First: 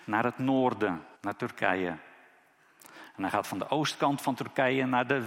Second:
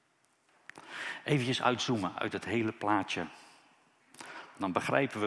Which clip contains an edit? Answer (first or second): first